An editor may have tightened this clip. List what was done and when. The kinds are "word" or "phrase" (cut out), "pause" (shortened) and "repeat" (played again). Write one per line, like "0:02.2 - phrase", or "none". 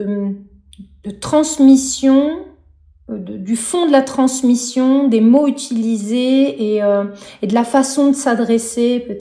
none